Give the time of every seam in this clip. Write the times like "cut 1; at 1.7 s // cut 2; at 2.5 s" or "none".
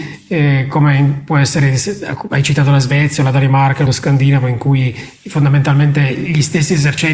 cut 1; at 3.9 s